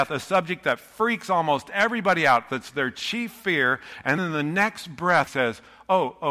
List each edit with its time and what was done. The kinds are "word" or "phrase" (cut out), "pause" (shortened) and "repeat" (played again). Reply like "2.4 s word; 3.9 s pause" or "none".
4.2 s word; 5.3 s word